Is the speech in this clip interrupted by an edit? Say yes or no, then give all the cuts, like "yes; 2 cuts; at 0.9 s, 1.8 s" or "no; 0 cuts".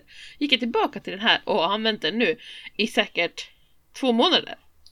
no; 0 cuts